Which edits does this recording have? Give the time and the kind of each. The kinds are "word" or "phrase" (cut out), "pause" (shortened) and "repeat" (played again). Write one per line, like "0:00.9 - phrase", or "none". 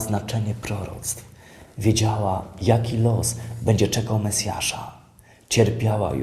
none